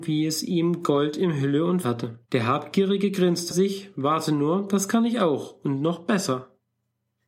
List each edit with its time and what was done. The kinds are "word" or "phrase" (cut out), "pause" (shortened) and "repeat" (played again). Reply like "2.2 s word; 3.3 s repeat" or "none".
1.8 s phrase; 2.2 s pause; 3.5 s phrase